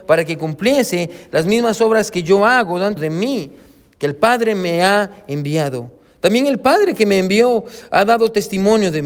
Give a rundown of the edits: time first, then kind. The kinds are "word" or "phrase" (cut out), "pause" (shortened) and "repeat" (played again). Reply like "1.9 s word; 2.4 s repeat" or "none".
3.0 s word